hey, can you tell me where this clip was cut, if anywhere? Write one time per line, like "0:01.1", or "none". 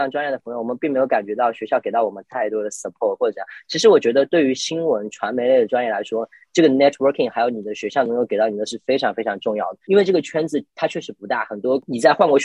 0:08.7
0:10.7